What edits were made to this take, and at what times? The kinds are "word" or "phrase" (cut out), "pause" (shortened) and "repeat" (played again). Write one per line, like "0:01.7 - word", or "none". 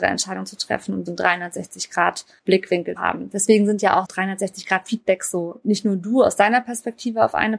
0:01.1 - word
0:03.0 - word
0:04.0 - word
0:05.6 - phrase

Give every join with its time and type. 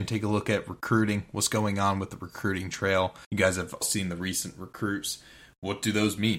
0:03.2 - pause
0:03.8 - word

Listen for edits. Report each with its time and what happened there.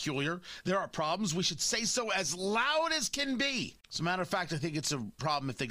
0:03.8 - pause

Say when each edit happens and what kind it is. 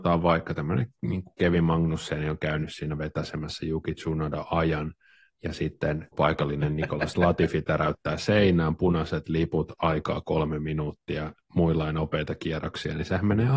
0:06.1 - word

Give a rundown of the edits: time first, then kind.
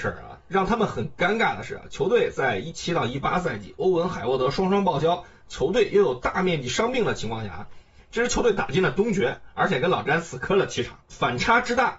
none

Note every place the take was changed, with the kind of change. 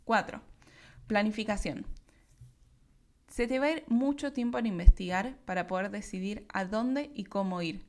none

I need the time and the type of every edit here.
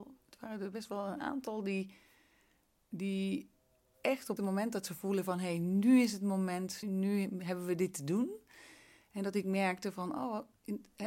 0:04.4 - phrase
0:06.8 - word

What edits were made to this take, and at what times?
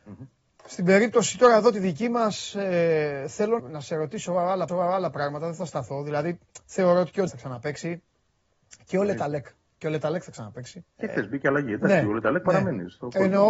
0:03.6 - word
0:04.7 - repeat
0:07.3 - word
0:10.9 - pause

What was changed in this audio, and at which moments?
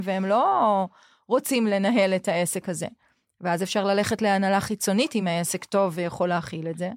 none

